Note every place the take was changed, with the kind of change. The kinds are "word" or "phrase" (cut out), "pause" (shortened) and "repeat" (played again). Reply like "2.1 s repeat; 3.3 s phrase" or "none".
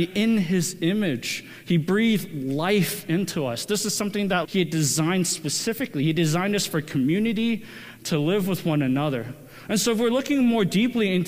4.4 s word